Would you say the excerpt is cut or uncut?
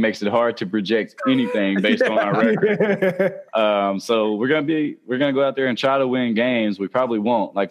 cut